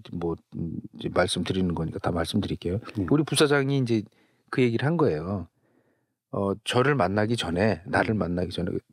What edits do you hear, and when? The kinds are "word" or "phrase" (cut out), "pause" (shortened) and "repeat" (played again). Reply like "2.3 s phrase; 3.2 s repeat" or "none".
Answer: none